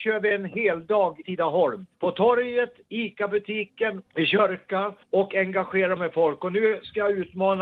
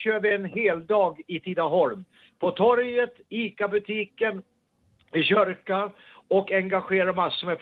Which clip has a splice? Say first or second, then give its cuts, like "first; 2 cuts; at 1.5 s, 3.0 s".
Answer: first; 5 cuts; at 1.2 s, 1.9 s, 4.1 s, 5.0 s, 6.0 s